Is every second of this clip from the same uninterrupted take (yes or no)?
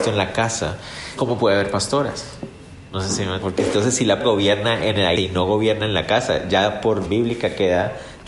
no